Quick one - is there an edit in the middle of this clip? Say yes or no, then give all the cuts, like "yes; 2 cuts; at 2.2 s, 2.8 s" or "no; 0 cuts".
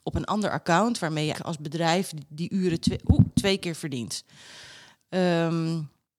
yes; 1 cut; at 1.3 s